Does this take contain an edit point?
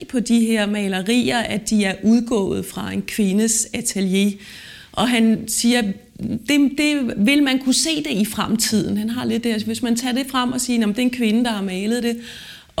no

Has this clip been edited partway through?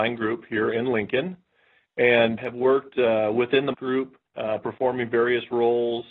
yes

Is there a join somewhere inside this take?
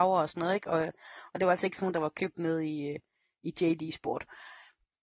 no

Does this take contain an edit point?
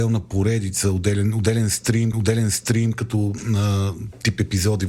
yes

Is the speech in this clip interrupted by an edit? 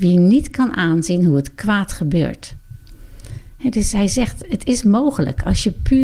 no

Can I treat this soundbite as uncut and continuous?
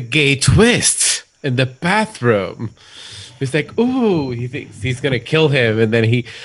yes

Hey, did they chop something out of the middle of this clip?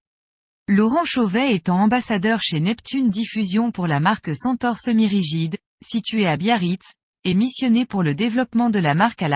no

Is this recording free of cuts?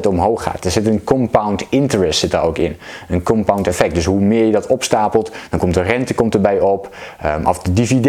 yes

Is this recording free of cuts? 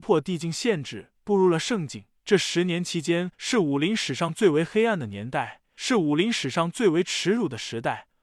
no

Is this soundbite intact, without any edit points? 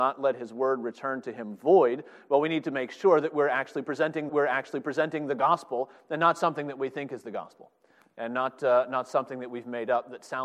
no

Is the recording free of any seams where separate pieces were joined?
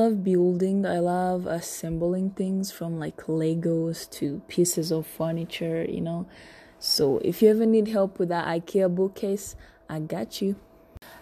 yes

